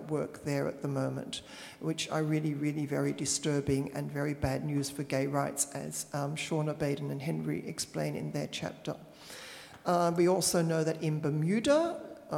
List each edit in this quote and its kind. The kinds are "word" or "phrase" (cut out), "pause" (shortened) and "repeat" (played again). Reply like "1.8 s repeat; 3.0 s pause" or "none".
none